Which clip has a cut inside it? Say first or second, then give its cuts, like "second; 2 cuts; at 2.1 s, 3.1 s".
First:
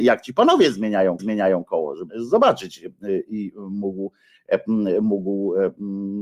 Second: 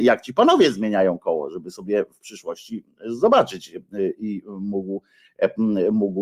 first; 2 cuts; at 1.2 s, 2.1 s